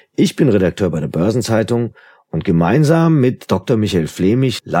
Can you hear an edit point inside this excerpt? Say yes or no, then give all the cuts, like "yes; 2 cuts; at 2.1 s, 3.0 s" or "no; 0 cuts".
no; 0 cuts